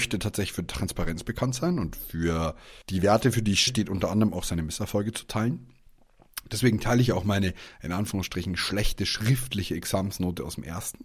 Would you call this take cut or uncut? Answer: cut